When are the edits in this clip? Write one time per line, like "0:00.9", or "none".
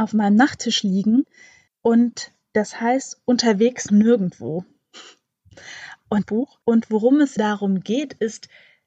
0:01.7
0:03.9
0:06.2
0:06.6
0:07.4